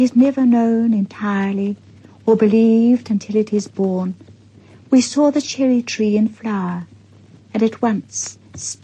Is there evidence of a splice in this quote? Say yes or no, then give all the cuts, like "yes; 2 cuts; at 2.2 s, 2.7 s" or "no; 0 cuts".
no; 0 cuts